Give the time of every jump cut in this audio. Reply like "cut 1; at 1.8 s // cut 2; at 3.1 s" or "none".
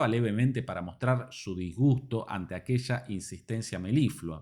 none